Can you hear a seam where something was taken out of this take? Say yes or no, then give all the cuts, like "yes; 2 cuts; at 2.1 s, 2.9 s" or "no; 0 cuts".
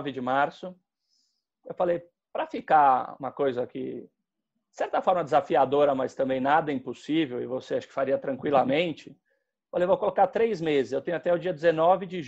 no; 0 cuts